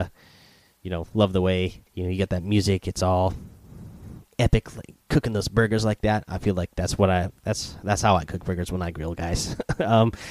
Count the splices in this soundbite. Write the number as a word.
one